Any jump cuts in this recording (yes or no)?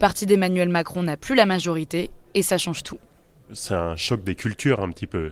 no